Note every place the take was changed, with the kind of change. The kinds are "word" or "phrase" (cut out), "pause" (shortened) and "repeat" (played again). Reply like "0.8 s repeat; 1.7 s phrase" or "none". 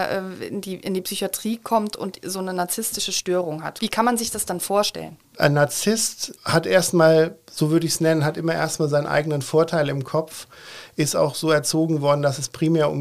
none